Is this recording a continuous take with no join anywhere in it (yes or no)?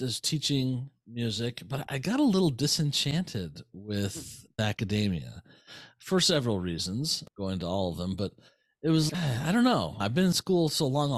no